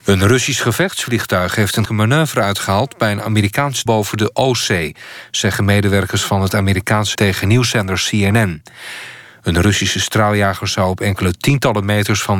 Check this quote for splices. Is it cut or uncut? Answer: cut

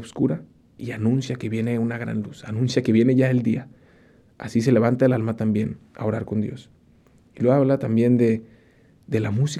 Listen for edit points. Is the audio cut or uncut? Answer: uncut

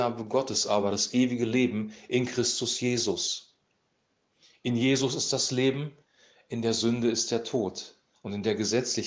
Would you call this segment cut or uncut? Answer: uncut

